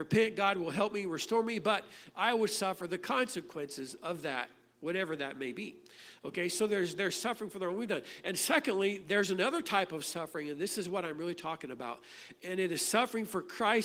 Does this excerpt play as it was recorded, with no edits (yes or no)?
yes